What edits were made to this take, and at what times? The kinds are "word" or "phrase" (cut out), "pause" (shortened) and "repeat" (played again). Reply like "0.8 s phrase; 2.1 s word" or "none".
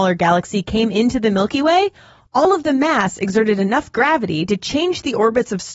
none